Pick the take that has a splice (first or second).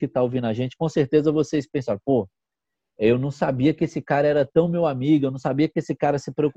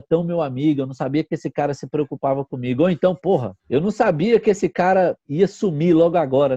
second